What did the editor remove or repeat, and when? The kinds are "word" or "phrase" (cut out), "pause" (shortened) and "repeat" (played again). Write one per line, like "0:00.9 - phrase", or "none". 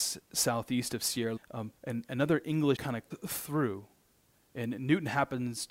0:01.4 - word
0:01.8 - pause
0:02.8 - word
0:03.1 - word

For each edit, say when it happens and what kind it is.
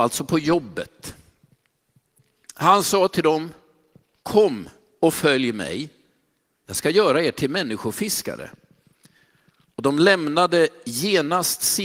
none

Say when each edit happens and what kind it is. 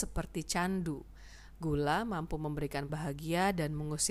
0:02.9 - word

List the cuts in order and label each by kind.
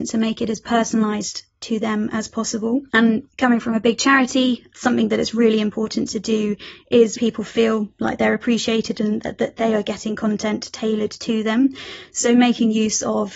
0:02.9 - pause
0:07.1 - word

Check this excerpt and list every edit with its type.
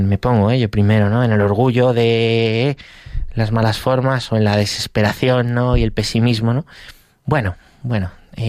none

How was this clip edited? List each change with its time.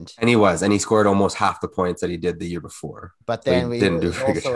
0:03.2 - pause

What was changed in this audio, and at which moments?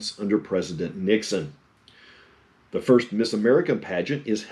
none

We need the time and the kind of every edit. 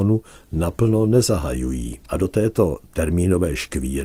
0:02.0 - pause

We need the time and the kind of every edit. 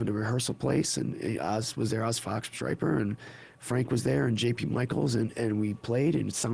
none

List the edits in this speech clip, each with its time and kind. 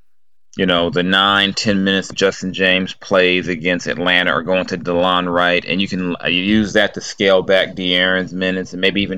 0:02.1 - word

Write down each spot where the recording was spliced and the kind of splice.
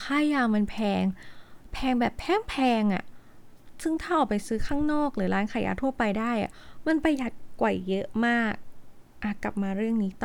0:09.1 - pause

